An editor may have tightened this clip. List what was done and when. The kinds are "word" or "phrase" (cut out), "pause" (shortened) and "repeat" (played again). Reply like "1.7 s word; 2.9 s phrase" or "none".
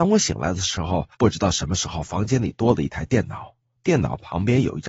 1.1 s pause; 3.8 s pause